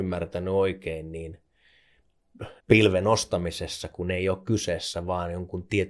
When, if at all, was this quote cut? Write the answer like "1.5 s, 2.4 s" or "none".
2.6 s